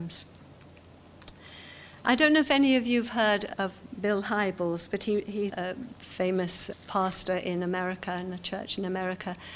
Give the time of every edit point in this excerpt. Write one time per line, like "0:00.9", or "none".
0:02.0
0:03.5
0:05.5
0:06.7

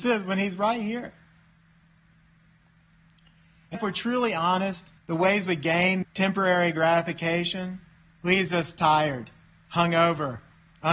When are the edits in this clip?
0:03.7
0:05.0
0:06.0

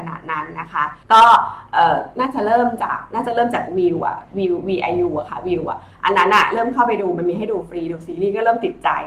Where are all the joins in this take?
0:01.0

